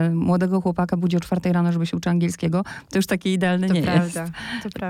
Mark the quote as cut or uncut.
cut